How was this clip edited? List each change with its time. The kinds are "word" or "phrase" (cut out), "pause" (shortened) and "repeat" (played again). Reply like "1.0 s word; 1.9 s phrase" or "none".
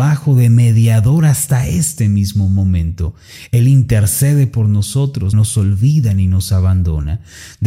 5.3 s phrase